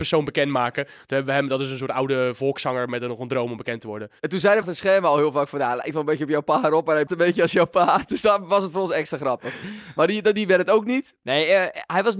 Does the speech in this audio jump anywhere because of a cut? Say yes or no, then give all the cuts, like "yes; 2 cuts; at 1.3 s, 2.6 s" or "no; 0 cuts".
yes; 2 cuts; at 4.6 s, 7.1 s